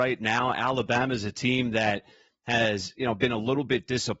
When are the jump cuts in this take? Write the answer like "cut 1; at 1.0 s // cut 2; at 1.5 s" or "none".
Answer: none